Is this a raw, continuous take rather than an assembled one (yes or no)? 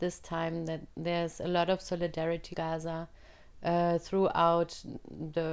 no